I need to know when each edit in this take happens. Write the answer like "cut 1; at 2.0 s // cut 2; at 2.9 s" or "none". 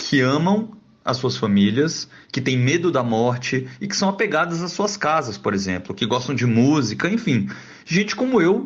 none